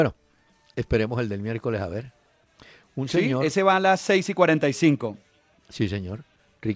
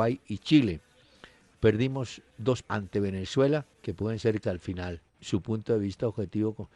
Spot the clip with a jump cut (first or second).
second